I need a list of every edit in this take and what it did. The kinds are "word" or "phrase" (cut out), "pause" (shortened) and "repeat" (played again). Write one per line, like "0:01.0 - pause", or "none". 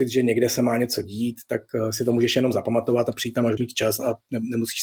0:03.6 - word